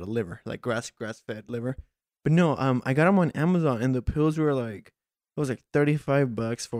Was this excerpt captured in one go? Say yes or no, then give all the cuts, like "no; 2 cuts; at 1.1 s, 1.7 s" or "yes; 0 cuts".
yes; 0 cuts